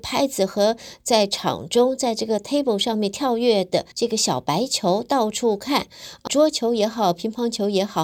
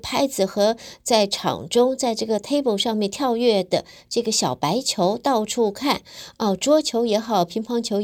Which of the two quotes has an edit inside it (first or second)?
first